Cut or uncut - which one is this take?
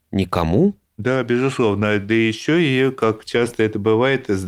uncut